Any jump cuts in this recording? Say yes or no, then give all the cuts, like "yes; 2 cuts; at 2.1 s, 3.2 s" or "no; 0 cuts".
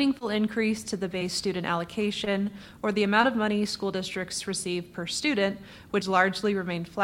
yes; 1 cut; at 6.0 s